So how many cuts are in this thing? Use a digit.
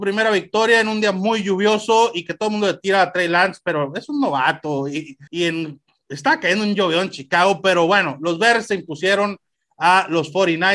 1